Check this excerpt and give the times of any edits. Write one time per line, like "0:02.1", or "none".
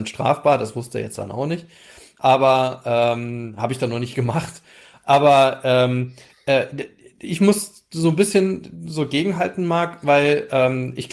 none